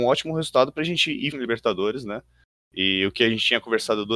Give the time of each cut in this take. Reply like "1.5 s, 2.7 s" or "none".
1.3 s